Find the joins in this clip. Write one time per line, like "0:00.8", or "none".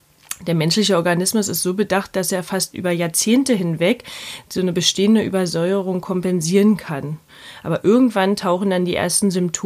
none